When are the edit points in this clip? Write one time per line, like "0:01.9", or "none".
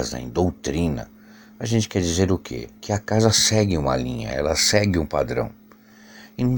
none